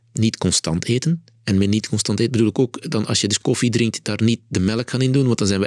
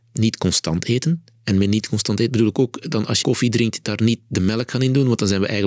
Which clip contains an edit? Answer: second; 1 cut; at 3.2 s

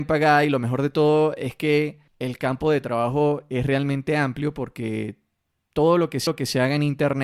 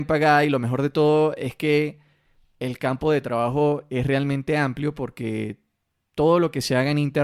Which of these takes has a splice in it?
first; 2 cuts; at 2.1 s, 6.3 s

